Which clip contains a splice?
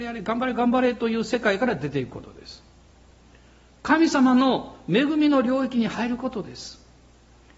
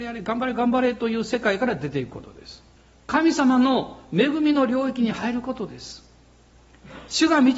second; 1 cut; at 2.8 s

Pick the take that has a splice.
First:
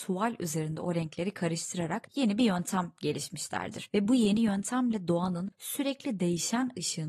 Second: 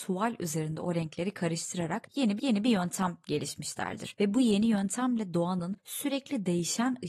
second; 1 cut; at 2.4 s

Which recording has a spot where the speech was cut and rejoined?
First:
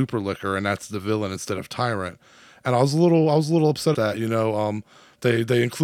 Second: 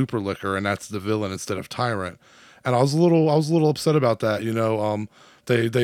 first; 1 cut; at 3.9 s

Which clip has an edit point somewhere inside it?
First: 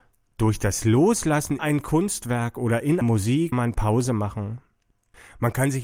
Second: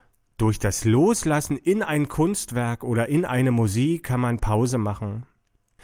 first; 3 cuts; at 1.6 s, 3.0 s, 3.5 s

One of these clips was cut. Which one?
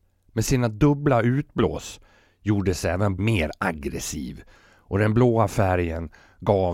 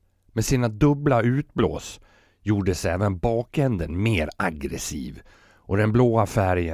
first; 1 cut; at 3.2 s

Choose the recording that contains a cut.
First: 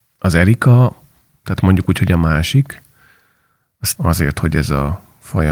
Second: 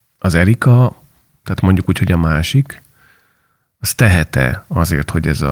first; 1 cut; at 3.9 s

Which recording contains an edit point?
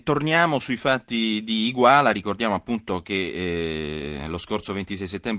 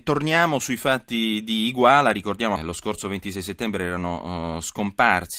second; 1 cut; at 2.6 s

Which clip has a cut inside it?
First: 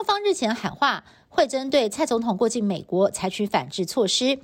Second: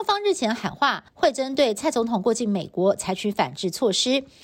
second; 1 cut; at 1.1 s

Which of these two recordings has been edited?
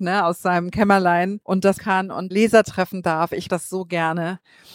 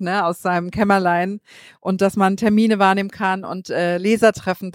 first; 4 cuts; at 1.4 s, 1.8 s, 2.3 s, 3.5 s

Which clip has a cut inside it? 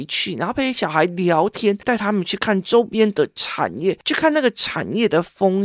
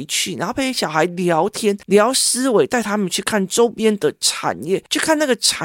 first; 1 cut; at 1.8 s

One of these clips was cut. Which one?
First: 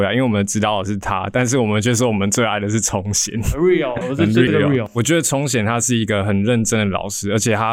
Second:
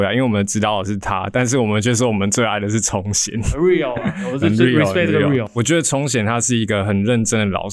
first; 2 cuts; at 4.0 s, 4.5 s

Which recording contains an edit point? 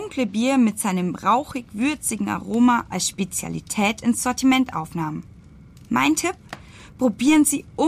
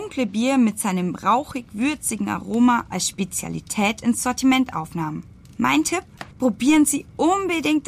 second; 2 cuts; at 5.4 s, 6.3 s

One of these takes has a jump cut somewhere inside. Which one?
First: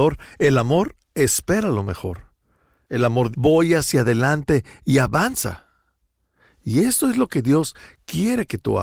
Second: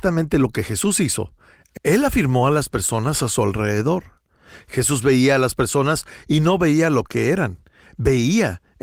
first; 1 cut; at 3.3 s

